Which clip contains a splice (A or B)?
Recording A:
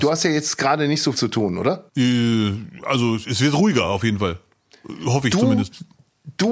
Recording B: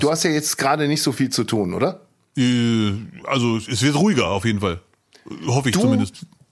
A